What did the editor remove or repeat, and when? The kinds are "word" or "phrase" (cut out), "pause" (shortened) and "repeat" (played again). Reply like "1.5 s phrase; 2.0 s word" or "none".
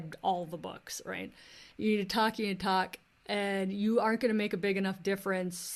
none

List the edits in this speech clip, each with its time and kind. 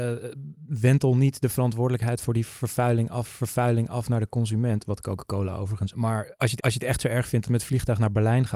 3.2 s repeat; 5.9 s phrase; 6.6 s repeat; 7.5 s word

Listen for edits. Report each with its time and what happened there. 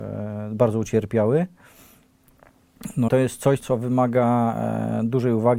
3.1 s word; 3.6 s word

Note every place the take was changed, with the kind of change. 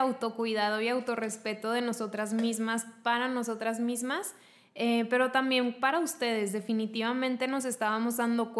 none

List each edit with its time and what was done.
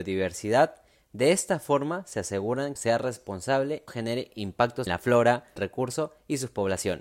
2.8 s phrase; 3.9 s phrase; 4.9 s phrase; 5.6 s phrase

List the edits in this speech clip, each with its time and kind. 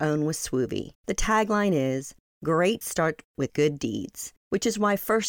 0.9 s pause; 2.8 s word; 4.4 s pause

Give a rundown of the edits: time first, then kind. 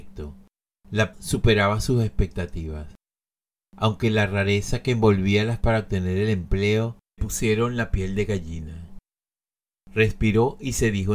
1.1 s word; 5.6 s word; 7.2 s word

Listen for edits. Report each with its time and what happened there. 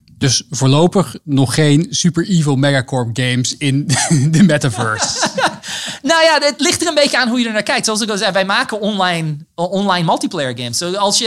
none

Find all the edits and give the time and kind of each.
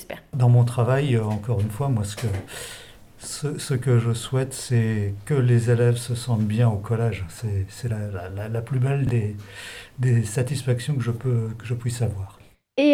none

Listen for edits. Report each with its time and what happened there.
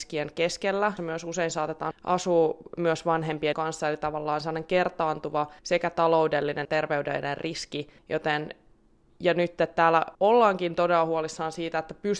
1.0 s word; 1.9 s word; 3.5 s word; 5.6 s pause; 6.6 s word; 8.0 s pause; 10.1 s pause

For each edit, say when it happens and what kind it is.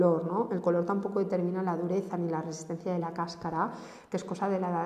none

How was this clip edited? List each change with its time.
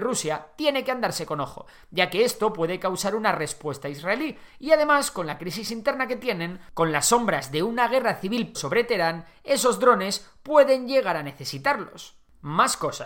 8.5 s word

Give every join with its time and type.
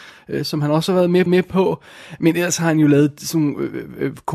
1.3 s repeat

